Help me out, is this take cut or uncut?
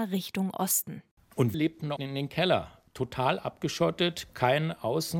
cut